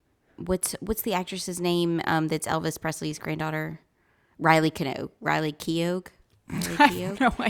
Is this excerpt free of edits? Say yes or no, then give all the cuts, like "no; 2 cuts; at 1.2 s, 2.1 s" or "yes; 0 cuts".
yes; 0 cuts